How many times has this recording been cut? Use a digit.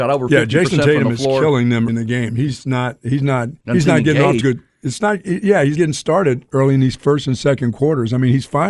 4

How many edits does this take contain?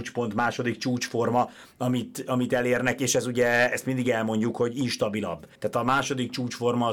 1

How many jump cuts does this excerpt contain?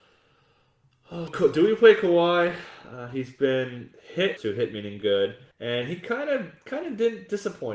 3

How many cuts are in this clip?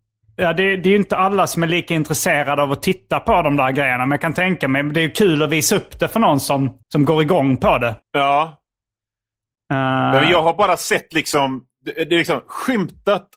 2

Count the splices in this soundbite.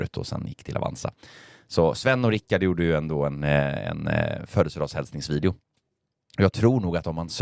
0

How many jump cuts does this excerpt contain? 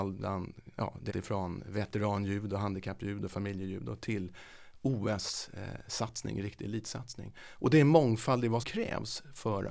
2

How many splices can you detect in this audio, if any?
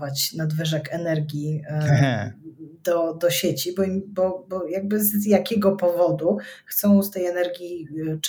0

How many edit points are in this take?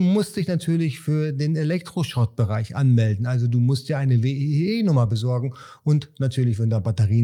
0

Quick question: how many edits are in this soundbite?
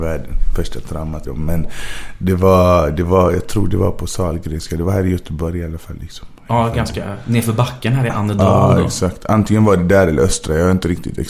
1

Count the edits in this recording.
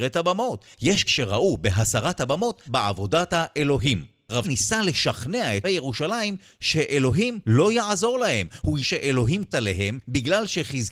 6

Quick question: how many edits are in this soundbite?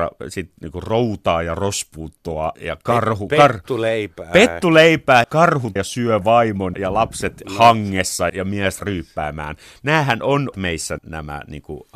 8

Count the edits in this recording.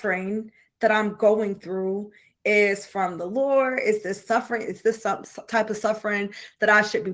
0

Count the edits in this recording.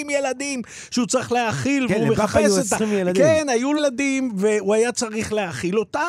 1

